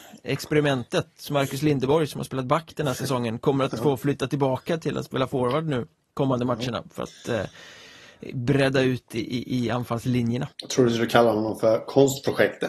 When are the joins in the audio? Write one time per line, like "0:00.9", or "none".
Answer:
0:10.5